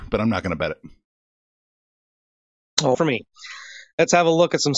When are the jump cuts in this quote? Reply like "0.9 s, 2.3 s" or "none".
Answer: 2.9 s